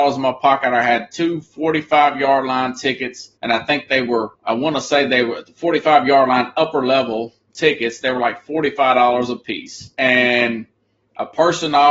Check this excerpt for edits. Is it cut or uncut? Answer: cut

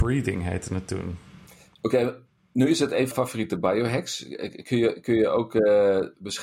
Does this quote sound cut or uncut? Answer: cut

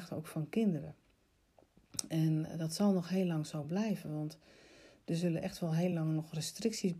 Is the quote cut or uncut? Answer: uncut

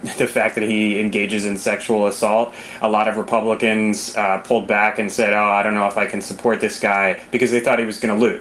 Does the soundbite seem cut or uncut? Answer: uncut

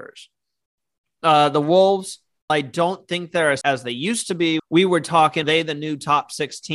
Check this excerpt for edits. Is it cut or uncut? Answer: cut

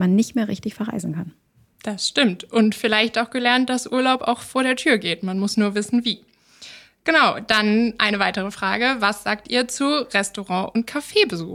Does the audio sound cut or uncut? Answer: uncut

